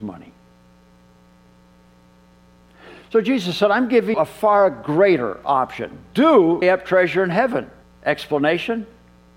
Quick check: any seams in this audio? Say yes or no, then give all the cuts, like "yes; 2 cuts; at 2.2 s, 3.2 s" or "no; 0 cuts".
yes; 3 cuts; at 4.1 s, 6.6 s, 7.8 s